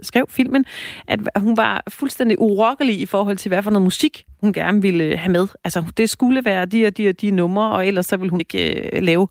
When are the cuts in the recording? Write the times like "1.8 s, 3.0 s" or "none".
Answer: 8.4 s

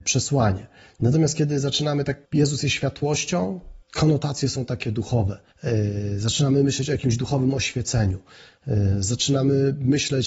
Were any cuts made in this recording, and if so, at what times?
2.2 s, 3.8 s, 5.5 s

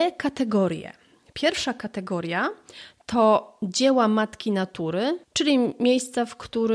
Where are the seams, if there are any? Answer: 5.2 s

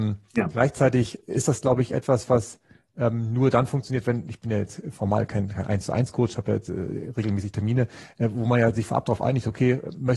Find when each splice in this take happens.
none

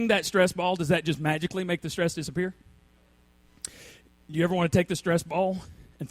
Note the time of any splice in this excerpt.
none

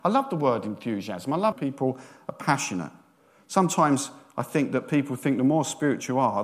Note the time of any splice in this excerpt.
1.5 s

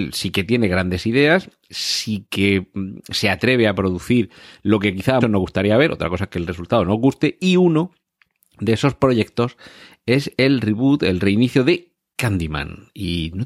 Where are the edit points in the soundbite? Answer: 5.2 s

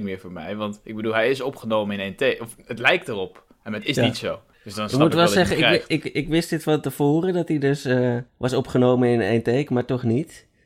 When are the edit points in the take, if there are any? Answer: 4.5 s, 8.3 s

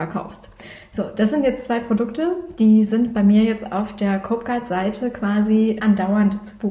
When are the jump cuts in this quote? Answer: 5.8 s

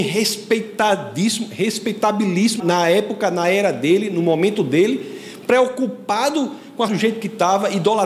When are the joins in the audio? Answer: 2.6 s, 6.9 s

